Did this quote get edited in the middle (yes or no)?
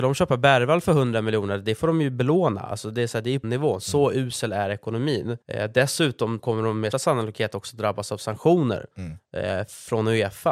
yes